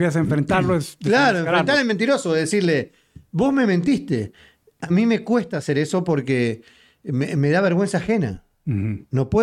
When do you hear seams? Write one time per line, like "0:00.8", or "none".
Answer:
none